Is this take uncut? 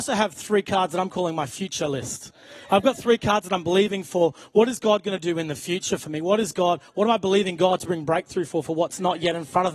yes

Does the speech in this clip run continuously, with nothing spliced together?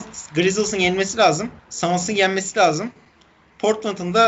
no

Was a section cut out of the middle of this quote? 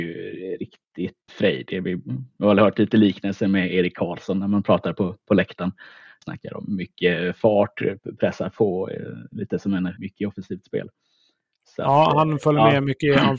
yes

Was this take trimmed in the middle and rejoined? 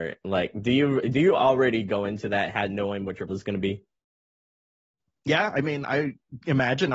yes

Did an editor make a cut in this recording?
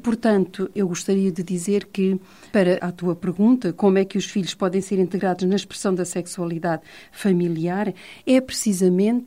yes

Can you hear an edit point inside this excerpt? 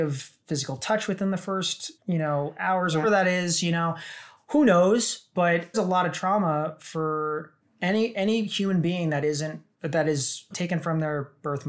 yes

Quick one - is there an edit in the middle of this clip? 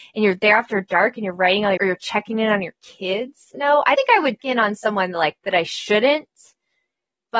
yes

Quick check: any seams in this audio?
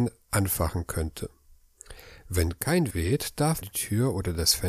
yes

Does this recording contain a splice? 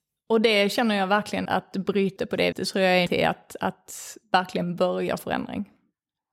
yes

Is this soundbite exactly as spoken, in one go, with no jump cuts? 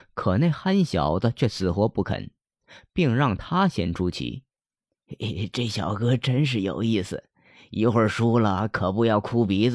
yes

